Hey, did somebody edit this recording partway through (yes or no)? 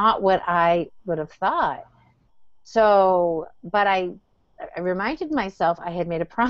no